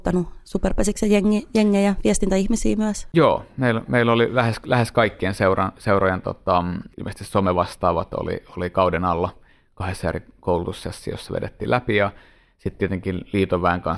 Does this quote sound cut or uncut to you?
cut